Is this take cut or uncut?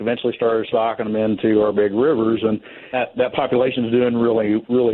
cut